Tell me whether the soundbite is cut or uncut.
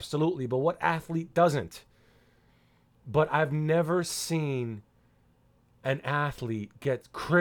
uncut